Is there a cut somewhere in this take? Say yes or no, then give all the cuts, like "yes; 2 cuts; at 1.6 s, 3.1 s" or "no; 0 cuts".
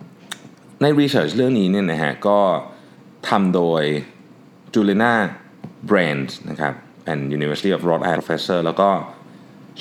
yes; 2 cuts; at 5.8 s, 8.1 s